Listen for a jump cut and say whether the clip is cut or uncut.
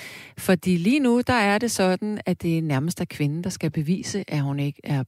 uncut